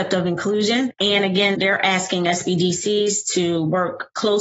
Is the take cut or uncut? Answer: cut